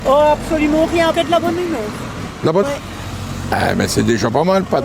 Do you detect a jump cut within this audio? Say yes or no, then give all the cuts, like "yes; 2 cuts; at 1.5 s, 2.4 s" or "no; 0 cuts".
yes; 2 cuts; at 1.1 s, 2.6 s